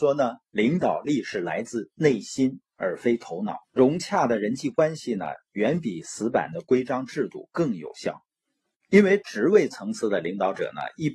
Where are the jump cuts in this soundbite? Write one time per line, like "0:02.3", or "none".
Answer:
0:03.6